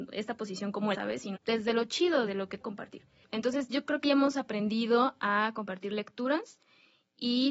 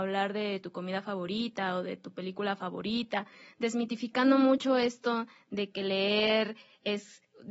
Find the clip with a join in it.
first; 5 cuts; at 0.9 s, 1.3 s, 2.3 s, 2.6 s, 4.0 s

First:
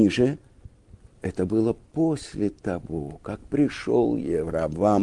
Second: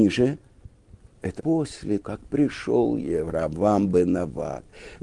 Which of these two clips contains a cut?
second; 2 cuts; at 1.4 s, 2.0 s

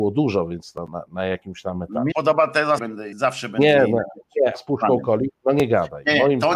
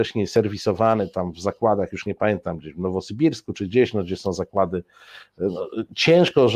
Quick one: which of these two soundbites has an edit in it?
first; 4 cuts; at 2.1 s, 2.8 s, 3.1 s, 4.5 s

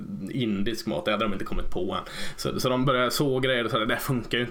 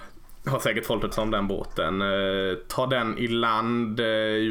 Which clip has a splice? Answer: second; 1 cut; at 1.1 s

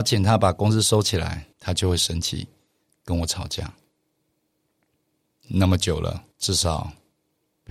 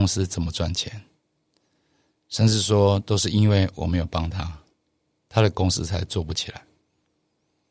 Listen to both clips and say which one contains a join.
first; 2 cuts; at 1.5 s, 6.3 s

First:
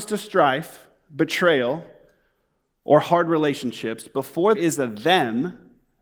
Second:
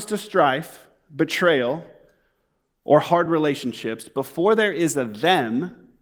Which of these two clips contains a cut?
first; 1 cut; at 4.5 s

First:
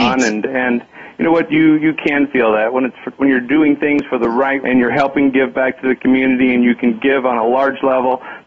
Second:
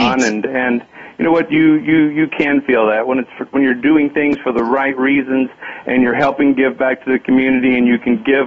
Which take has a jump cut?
first; 2 cuts; at 1.8 s, 4.6 s

